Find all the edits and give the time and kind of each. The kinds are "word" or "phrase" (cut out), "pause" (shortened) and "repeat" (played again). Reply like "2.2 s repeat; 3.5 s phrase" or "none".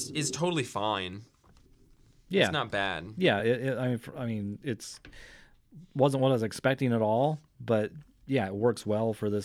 none